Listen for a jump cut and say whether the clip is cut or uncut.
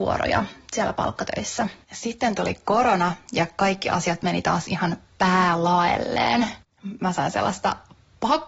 cut